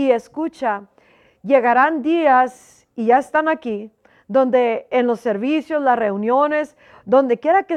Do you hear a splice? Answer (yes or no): no